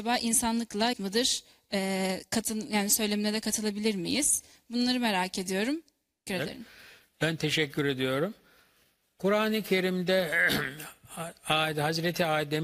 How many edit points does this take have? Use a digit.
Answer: 2